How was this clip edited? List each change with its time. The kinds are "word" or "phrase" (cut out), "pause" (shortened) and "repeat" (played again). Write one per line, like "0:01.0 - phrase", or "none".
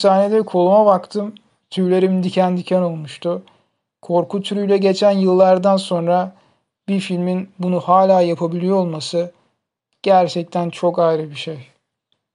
none